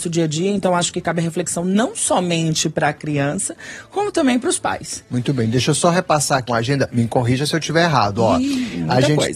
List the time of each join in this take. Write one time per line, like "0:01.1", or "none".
0:06.5